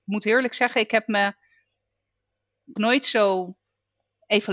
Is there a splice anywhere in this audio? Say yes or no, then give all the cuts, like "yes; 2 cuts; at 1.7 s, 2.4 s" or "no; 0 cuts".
yes; 1 cut; at 2.8 s